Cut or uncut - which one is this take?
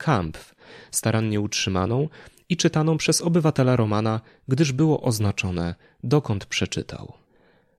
uncut